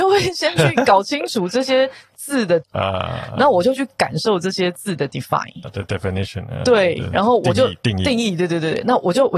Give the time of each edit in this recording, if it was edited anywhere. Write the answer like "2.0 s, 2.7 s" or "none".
2.6 s, 5.6 s